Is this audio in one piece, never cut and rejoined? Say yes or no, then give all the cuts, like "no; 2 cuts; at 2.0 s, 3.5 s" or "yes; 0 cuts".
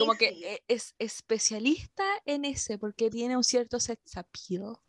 yes; 0 cuts